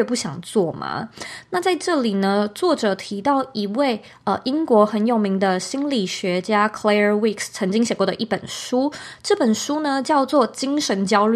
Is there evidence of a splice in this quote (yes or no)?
no